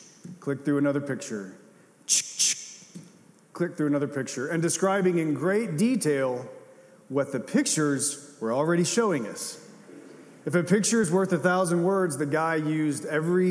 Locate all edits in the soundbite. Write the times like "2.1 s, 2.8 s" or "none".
none

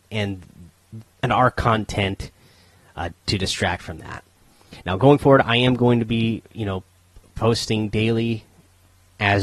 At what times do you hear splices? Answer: 1.1 s, 3.1 s

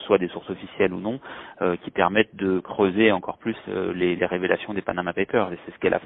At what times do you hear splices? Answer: none

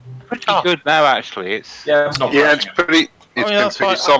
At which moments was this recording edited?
2.1 s

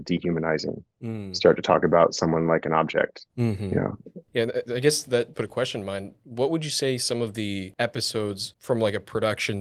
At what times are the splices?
3.3 s, 5.3 s

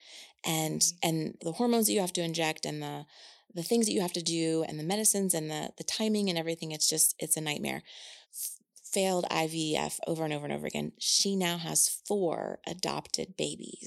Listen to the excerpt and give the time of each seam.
1.4 s, 8.2 s

